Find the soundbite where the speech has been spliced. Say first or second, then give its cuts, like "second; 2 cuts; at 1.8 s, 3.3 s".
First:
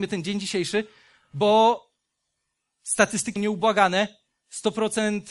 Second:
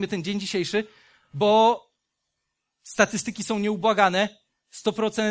first; 1 cut; at 3.4 s